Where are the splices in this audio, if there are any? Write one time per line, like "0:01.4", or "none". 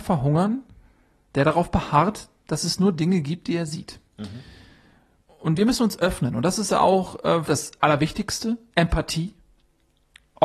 0:04.1
0:07.5